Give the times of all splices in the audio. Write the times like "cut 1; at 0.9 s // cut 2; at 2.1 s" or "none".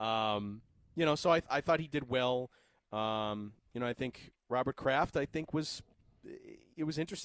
none